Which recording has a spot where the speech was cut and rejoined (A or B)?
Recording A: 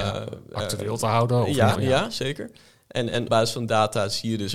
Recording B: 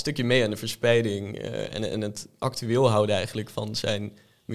A